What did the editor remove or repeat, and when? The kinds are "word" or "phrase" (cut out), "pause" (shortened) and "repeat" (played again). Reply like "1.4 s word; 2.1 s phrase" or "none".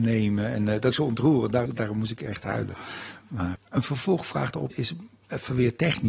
0.9 s word; 1.7 s word; 3.6 s word; 4.7 s word